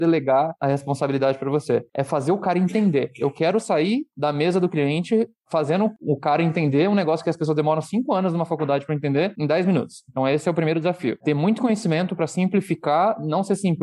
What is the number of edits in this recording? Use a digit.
0